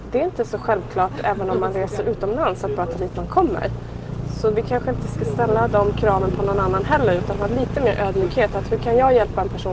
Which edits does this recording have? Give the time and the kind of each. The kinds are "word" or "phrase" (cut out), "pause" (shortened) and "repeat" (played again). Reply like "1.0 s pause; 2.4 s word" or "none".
3.0 s word